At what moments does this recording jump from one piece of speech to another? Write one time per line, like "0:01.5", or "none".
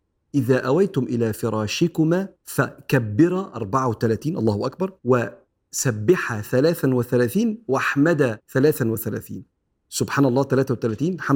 0:02.4
0:05.0
0:08.4